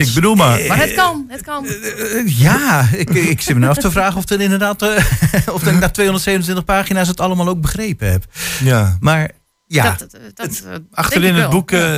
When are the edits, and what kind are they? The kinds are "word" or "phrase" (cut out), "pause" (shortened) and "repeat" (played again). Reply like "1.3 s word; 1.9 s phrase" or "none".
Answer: none